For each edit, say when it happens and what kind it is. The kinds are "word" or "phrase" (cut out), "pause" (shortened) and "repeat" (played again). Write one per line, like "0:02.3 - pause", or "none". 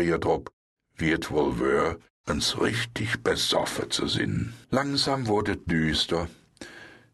0:04.6 - pause